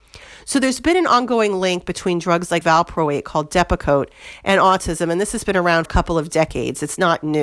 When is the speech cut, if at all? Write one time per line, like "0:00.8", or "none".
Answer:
0:02.6
0:05.9